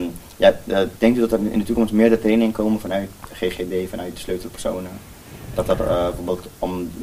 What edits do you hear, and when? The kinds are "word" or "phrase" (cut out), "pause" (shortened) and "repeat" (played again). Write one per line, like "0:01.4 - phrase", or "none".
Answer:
none